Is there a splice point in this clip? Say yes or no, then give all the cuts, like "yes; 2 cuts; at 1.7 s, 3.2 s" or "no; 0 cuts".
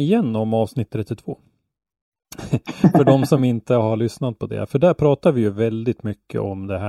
no; 0 cuts